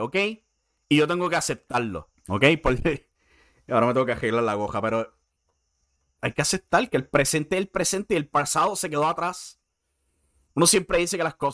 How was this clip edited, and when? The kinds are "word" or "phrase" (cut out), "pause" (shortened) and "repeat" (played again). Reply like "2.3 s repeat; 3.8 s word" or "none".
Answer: 2.2 s pause